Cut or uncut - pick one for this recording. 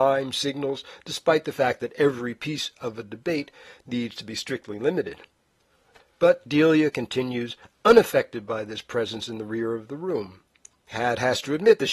uncut